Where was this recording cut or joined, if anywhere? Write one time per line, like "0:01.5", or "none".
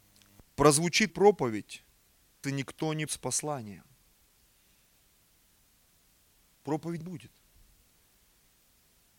0:01.1
0:02.4
0:03.1
0:07.0